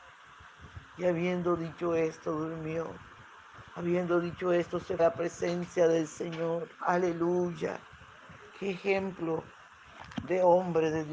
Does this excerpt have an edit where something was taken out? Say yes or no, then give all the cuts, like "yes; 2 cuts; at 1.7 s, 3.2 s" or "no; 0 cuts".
yes; 3 cuts; at 3.7 s, 5.0 s, 6.7 s